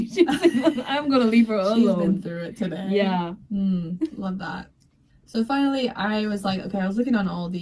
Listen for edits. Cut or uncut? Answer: uncut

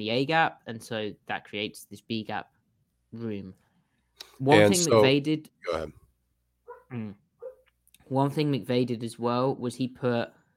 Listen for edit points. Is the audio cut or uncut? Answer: uncut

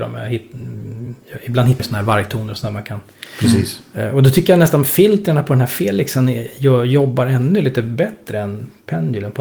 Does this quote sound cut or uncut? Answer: cut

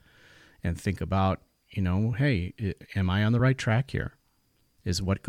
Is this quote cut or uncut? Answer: uncut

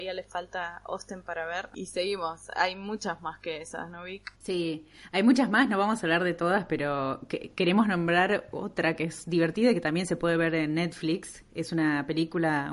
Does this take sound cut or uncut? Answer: cut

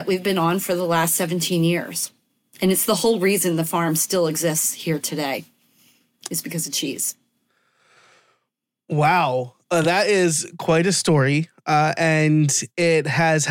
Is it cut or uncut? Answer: uncut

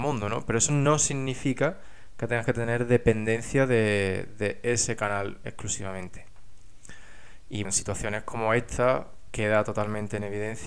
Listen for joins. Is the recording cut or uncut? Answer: cut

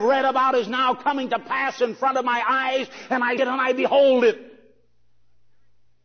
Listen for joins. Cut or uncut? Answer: cut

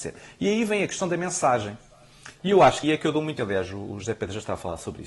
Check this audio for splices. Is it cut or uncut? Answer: cut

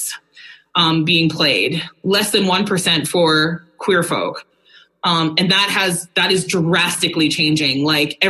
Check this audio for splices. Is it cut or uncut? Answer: uncut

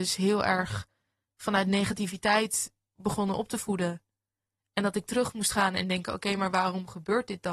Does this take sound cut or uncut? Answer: uncut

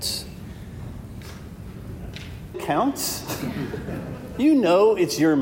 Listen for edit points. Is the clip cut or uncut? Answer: cut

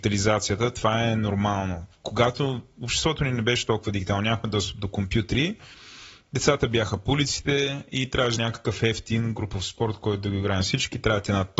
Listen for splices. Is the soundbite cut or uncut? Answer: cut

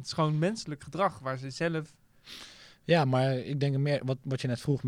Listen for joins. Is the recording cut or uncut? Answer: uncut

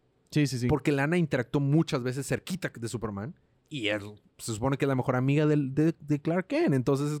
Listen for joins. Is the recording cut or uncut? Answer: uncut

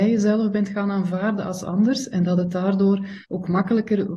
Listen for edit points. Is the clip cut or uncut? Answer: cut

